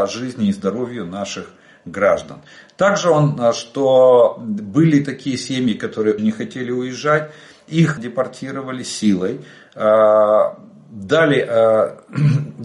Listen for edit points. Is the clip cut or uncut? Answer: cut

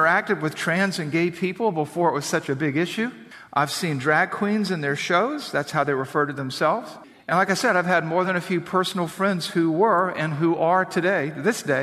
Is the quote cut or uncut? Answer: uncut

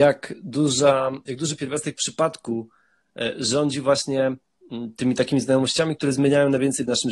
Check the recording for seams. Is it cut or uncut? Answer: uncut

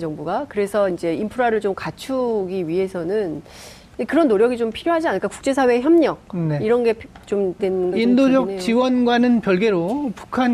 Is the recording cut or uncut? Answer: cut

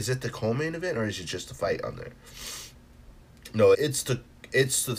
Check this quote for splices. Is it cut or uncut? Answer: cut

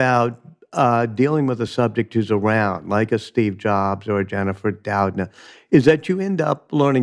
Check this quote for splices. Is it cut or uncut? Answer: uncut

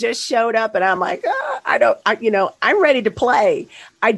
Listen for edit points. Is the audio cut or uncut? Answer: uncut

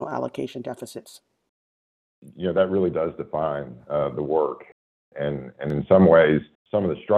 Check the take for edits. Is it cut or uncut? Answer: uncut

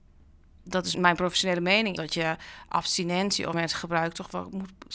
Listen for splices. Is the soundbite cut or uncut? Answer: cut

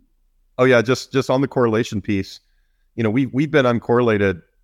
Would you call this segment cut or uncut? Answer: uncut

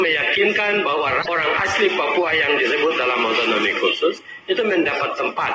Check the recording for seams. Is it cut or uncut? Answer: uncut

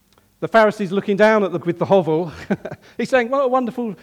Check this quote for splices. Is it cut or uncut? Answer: cut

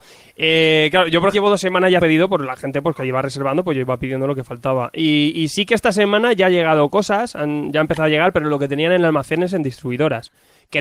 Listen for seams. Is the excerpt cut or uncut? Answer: cut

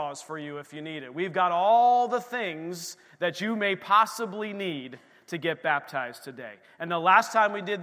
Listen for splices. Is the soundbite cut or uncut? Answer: uncut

